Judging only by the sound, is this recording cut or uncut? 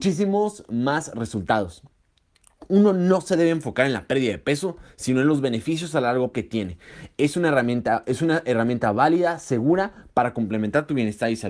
cut